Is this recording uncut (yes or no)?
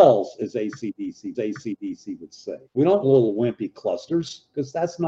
no